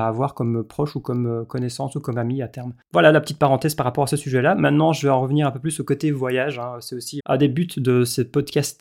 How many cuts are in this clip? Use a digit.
1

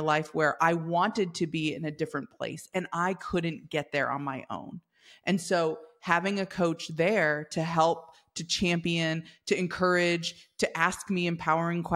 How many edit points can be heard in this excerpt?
0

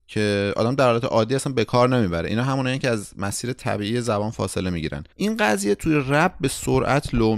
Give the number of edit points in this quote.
1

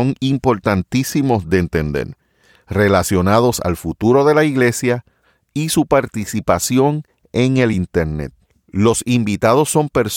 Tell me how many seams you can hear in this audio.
0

